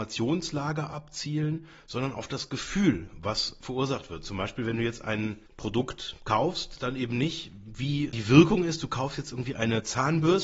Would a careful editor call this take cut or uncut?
cut